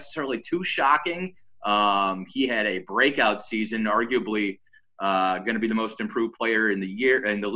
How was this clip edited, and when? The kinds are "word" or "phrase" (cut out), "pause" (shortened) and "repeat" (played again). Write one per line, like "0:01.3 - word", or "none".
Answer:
none